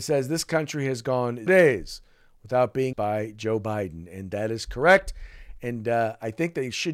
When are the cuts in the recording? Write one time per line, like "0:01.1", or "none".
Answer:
0:01.5
0:02.9

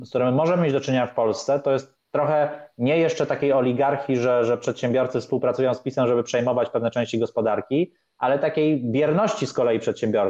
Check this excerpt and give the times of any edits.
none

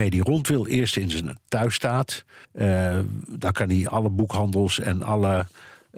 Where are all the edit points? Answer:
0:02.4

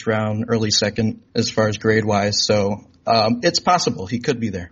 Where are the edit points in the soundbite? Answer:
0:01.3

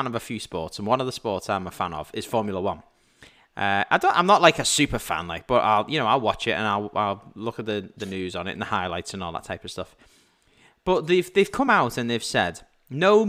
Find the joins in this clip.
none

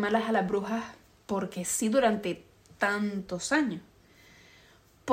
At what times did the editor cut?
none

